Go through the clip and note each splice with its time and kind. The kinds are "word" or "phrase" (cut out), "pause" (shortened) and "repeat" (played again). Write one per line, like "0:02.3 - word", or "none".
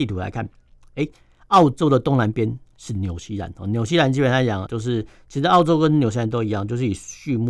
0:04.7 - word